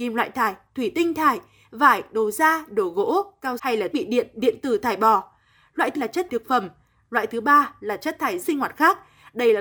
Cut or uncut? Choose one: cut